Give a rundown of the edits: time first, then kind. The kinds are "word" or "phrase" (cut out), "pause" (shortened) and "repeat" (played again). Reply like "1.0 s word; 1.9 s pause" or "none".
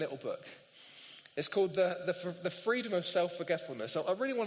none